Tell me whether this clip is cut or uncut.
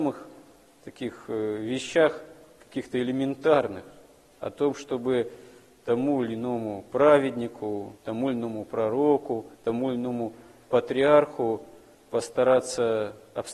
cut